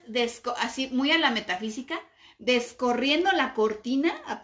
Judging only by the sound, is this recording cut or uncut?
uncut